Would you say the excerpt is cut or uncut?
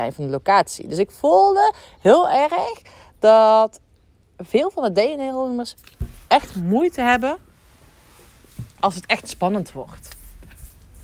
uncut